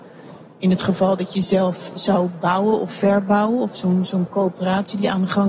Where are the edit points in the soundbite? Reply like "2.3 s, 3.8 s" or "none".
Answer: none

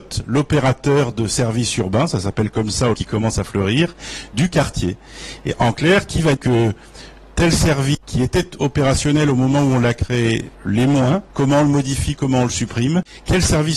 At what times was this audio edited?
2.9 s, 6.4 s, 8.0 s, 10.5 s, 11.3 s

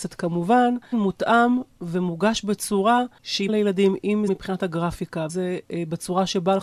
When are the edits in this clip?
0.9 s, 3.5 s, 4.3 s, 5.3 s

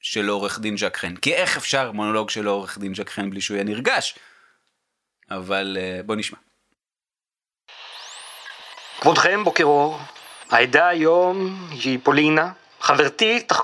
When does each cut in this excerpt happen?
none

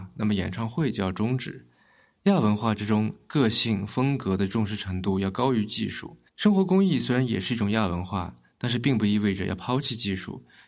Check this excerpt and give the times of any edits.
6.3 s

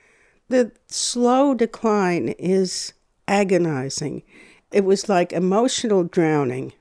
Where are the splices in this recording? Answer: none

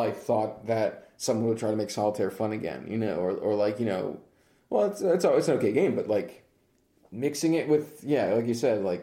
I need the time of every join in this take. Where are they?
none

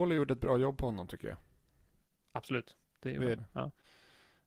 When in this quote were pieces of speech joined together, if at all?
2.8 s, 3.4 s

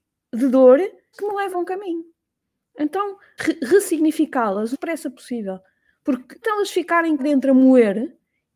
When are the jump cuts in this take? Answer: 1.1 s, 1.5 s, 3.4 s, 4.7 s, 6.4 s, 7.2 s

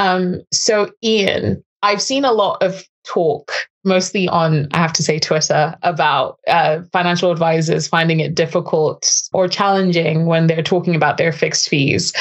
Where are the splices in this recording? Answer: 5.8 s, 9.3 s

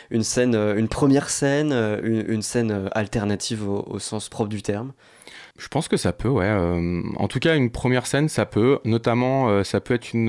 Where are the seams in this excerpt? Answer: 5.5 s

